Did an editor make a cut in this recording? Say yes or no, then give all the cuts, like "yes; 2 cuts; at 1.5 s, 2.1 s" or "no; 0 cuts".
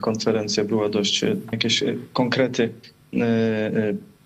yes; 1 cut; at 1.5 s